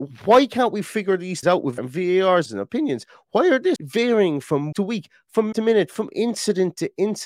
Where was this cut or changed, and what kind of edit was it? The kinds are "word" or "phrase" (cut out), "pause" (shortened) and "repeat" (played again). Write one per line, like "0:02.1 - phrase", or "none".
0:01.4 - word
0:01.8 - word
0:02.5 - word
0:03.8 - word
0:04.7 - word
0:05.5 - word